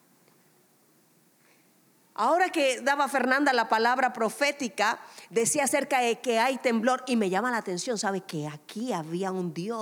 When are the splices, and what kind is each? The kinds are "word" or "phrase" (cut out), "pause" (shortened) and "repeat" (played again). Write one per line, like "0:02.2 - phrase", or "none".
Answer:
none